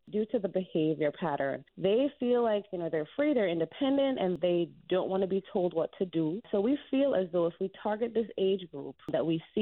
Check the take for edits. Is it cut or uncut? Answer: uncut